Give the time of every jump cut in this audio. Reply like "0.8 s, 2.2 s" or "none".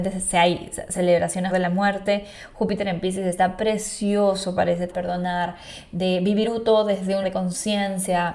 0.9 s, 1.5 s, 4.9 s, 6.4 s, 7.2 s

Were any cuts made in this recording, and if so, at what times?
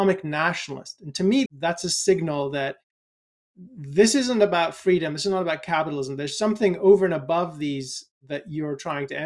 1.5 s, 8.1 s

